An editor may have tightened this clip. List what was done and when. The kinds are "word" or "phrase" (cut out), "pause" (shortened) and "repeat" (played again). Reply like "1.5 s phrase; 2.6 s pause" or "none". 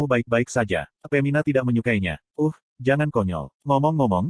1.0 s pause; 2.2 s pause